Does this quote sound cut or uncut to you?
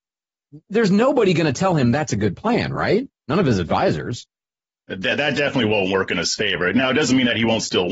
cut